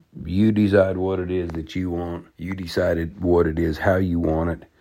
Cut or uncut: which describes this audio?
cut